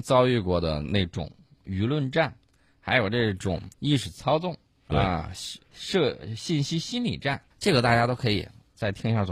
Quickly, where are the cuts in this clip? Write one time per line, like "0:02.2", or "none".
0:03.7
0:05.6
0:07.5